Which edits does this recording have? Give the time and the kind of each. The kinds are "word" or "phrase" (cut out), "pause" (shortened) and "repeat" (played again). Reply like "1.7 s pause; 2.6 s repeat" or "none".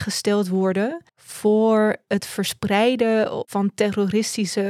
1.1 s pause